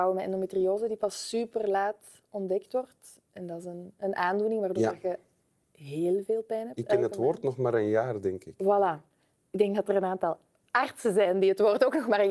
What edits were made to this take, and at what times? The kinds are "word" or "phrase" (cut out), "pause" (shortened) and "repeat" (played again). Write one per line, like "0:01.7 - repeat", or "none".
none

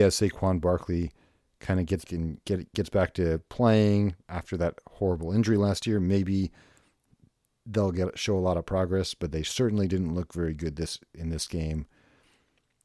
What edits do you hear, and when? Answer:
0:02.1 - word

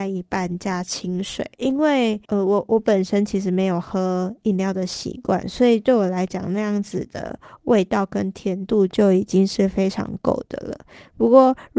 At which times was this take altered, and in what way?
0:01.5 - pause
0:02.2 - pause

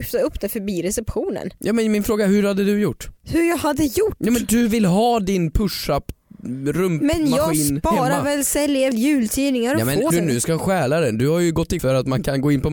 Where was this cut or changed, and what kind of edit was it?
0:03.2 - pause
0:08.9 - word
0:10.1 - phrase
0:11.8 - word

